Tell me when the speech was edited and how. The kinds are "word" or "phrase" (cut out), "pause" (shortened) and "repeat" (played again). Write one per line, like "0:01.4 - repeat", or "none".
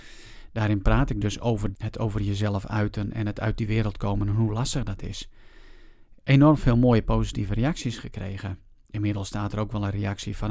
0:01.7 - word

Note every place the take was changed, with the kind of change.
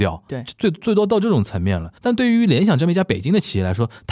0:02.0 - pause

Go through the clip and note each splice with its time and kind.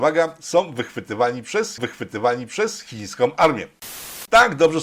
0:01.8 - repeat

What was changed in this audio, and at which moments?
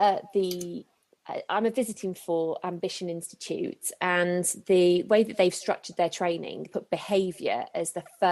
0:02.2 - word
0:06.7 - word

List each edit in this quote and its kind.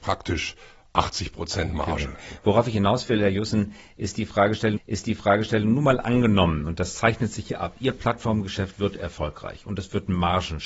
0:04.8 - repeat

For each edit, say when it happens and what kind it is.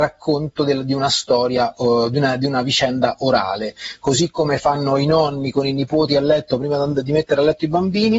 none

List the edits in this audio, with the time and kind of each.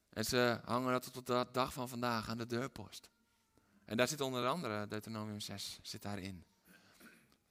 none

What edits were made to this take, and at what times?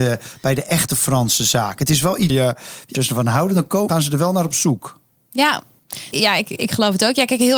0:02.3 - word
0:02.9 - word
0:03.9 - word
0:06.1 - word
0:06.4 - word

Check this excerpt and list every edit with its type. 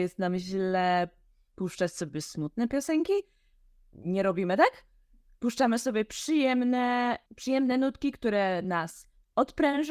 none

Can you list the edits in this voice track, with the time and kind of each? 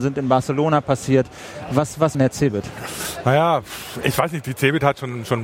0:02.1 - phrase
0:04.0 - word

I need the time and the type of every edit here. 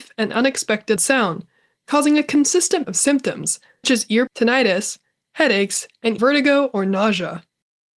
0:01.0 - word
0:02.8 - word
0:03.8 - word
0:04.3 - word
0:06.2 - word

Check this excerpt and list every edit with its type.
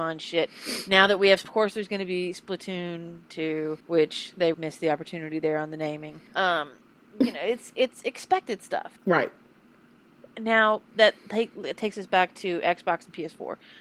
0:01.4 - word
0:03.8 - pause
0:04.5 - word
0:06.3 - pause
0:09.0 - pause
0:10.9 - word

